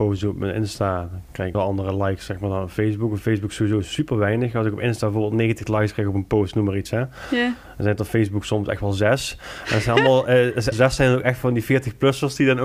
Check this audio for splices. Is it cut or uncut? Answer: cut